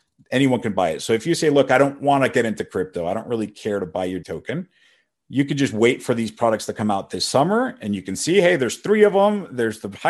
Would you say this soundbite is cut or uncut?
cut